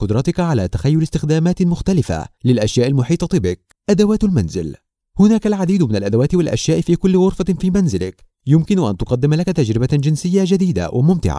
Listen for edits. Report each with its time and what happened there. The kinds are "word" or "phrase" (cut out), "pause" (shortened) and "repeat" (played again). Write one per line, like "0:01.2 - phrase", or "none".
0:03.7 - pause